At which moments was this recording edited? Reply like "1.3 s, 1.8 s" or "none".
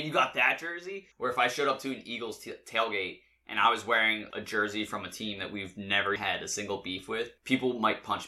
1.1 s, 4.3 s, 6.2 s, 7.4 s